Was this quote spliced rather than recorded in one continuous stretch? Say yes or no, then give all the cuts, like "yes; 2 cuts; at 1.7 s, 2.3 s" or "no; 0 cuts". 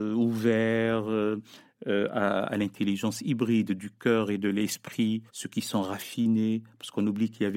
yes; 1 cut; at 5.3 s